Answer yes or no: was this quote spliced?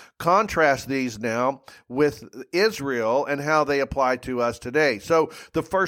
no